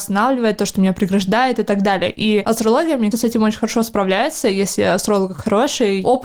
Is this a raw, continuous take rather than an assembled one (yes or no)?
no